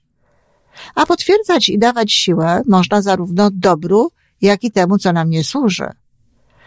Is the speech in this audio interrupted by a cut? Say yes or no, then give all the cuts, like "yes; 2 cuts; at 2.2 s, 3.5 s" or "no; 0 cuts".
no; 0 cuts